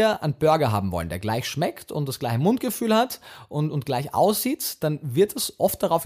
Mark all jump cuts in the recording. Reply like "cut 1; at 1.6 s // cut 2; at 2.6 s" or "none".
none

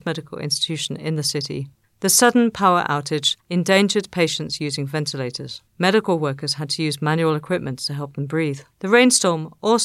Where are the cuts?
cut 1; at 1.8 s // cut 2; at 3.4 s // cut 3; at 5.7 s // cut 4; at 8.7 s

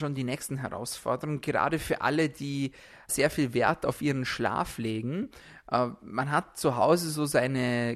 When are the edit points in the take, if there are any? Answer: cut 1; at 3.1 s

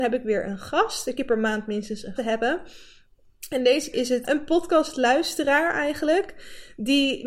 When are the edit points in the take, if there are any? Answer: cut 1; at 1.2 s // cut 2; at 2.2 s // cut 3; at 3.9 s // cut 4; at 4.2 s

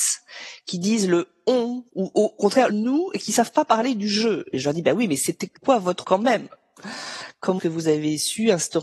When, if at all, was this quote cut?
cut 1; at 1.9 s // cut 2; at 2.7 s // cut 3; at 5.6 s // cut 4; at 6.0 s // cut 5; at 7.6 s

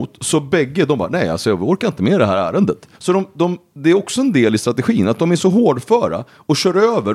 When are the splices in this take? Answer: cut 1; at 2.9 s

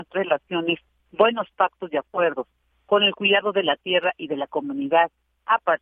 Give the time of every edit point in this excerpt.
none

